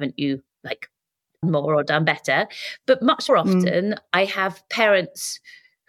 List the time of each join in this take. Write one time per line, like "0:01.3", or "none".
0:01.4
0:03.3

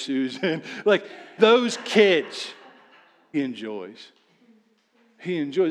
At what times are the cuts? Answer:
0:01.4
0:03.3

